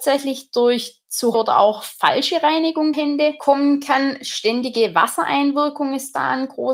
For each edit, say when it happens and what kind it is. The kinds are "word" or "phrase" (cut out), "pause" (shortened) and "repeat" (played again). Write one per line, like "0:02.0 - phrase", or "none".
0:01.3 - word
0:02.9 - word